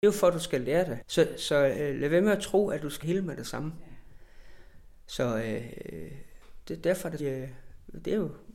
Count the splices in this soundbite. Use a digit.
2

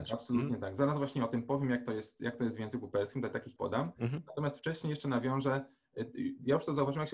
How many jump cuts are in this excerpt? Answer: 1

